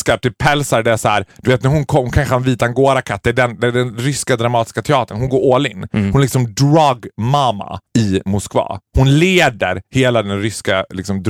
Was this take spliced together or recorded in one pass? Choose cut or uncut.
cut